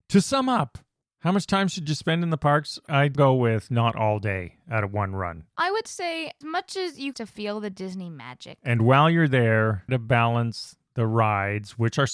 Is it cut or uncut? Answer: cut